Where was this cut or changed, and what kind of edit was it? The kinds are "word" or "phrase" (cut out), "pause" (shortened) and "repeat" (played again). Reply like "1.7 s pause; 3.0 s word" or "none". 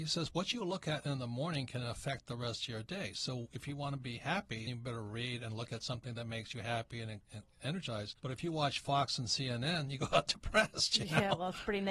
4.7 s word; 8.2 s pause

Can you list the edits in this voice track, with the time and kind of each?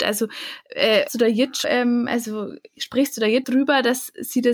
1.1 s word; 1.6 s word; 3.4 s word

